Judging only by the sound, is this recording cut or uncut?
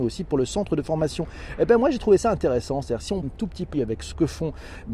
cut